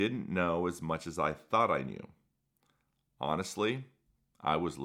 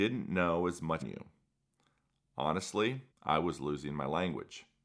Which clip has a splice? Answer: second; 2 cuts; at 1.0 s, 3.1 s

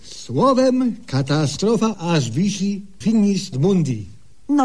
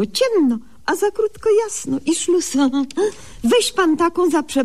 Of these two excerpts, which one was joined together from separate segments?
first; 3 cuts; at 1.9 s, 3.0 s, 3.5 s

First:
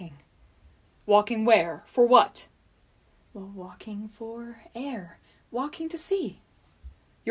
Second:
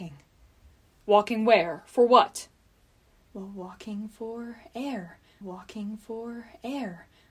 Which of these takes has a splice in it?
second; 1 cut; at 5.4 s

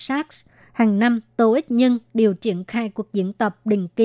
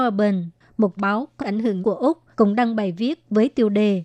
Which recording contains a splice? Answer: second; 4 cuts; at 1.0 s, 1.4 s, 1.8 s, 2.3 s

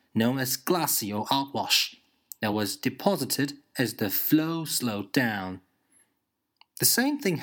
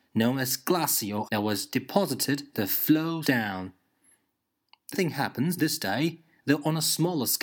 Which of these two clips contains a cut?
second; 5 cuts; at 1.2 s, 2.5 s, 3.2 s, 4.9 s, 5.6 s

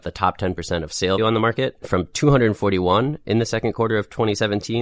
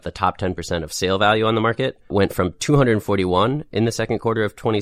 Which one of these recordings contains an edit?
first; 2 cuts; at 1.2 s, 1.8 s

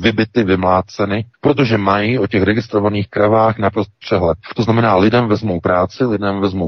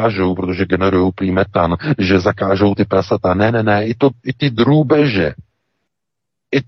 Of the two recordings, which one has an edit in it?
first; 1 cut; at 1.3 s

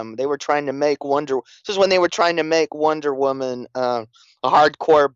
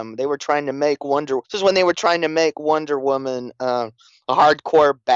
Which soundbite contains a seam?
second; 1 cut; at 1.4 s

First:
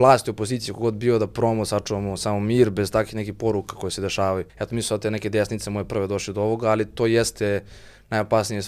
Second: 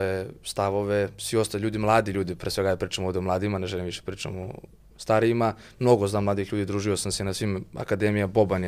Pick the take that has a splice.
first; 1 cut; at 4.5 s

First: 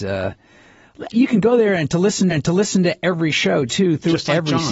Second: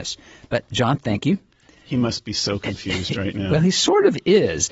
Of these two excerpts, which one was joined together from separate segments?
first; 2 cuts; at 1.1 s, 2.3 s

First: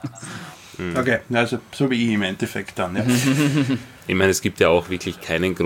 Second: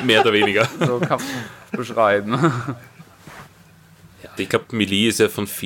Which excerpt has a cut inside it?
second; 2 cuts; at 1.2 s, 4.4 s

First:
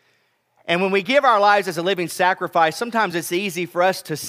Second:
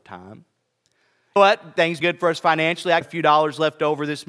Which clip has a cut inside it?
second; 3 cuts; at 1.4 s, 2.0 s, 3.0 s

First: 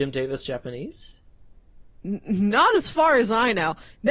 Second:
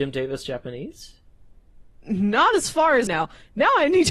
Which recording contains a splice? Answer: second; 2 cuts; at 2.0 s, 3.1 s

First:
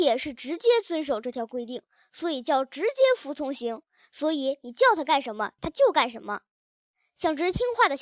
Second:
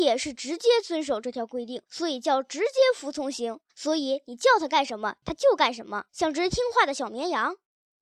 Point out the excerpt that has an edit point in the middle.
second; 3 cuts; at 1.9 s, 3.7 s, 6.1 s

